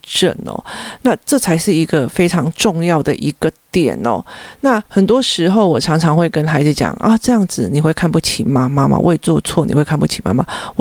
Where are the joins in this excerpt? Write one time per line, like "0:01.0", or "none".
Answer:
0:04.9